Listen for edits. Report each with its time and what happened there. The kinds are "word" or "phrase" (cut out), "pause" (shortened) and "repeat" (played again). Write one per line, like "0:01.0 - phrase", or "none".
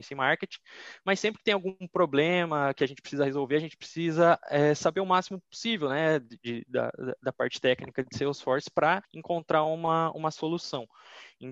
0:09.0 - pause